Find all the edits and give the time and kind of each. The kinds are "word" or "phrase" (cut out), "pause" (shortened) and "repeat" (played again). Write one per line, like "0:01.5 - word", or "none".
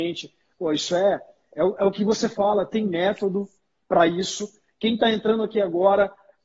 none